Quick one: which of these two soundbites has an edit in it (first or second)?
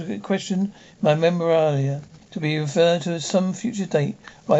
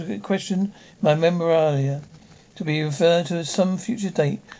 first